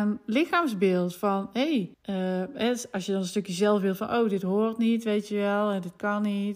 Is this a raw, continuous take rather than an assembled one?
no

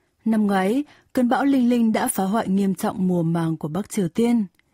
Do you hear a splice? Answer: no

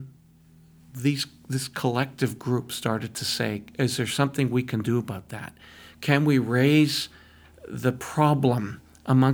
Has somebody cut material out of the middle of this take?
no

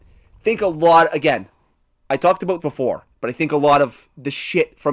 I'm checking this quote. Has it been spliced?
yes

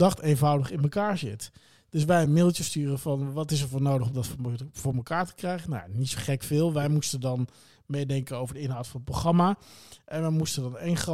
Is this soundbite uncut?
yes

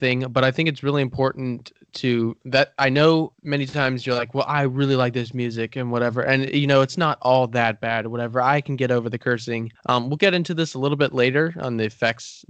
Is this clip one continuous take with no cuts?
no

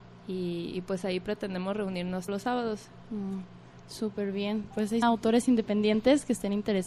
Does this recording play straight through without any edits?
no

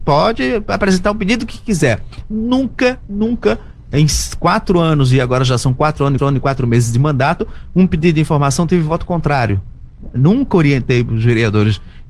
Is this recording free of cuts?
no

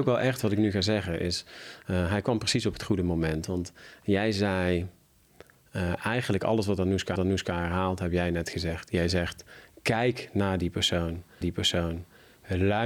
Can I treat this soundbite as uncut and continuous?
no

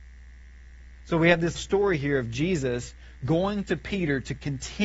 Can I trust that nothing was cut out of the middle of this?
no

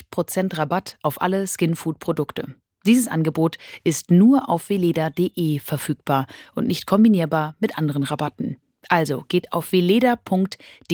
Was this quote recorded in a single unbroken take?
yes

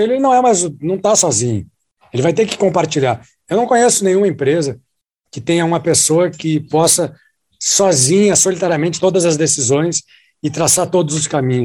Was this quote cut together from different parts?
yes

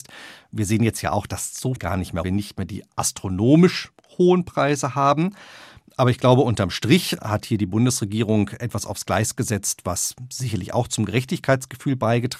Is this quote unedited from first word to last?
no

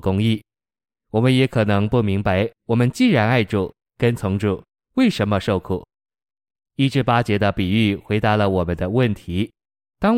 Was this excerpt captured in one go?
no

